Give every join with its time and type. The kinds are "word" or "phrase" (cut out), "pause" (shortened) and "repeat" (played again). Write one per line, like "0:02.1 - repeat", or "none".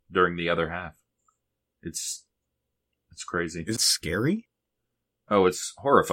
0:03.8 - word